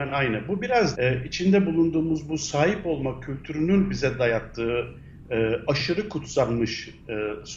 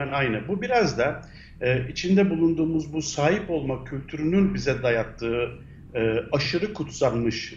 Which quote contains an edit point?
first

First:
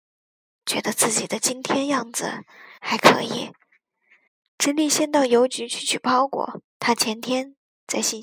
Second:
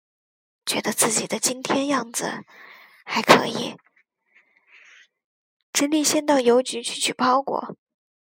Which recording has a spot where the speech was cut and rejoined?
first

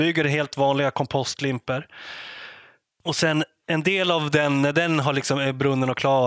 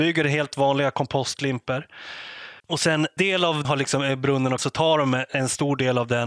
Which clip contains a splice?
second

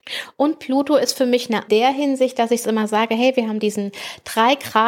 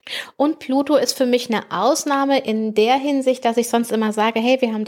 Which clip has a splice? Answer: first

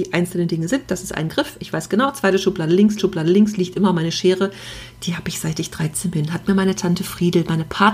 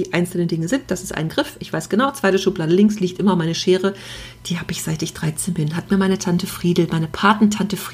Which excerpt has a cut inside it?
first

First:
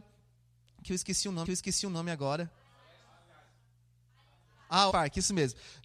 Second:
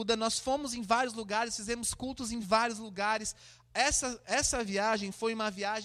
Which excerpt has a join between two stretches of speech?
first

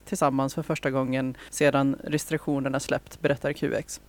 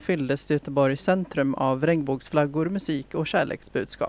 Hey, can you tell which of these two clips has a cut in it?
first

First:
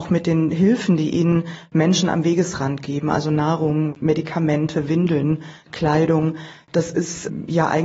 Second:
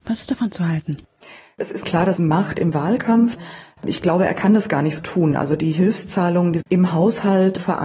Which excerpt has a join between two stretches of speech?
second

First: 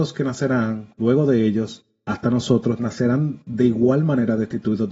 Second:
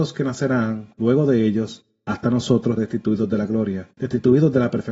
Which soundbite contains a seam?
second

